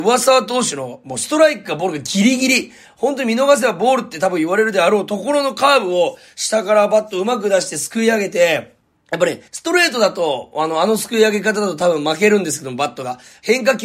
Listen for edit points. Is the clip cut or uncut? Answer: cut